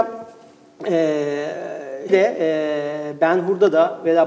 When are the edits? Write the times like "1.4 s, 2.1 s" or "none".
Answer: 2.1 s